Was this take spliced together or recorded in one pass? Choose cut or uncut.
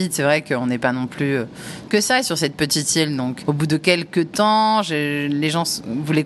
cut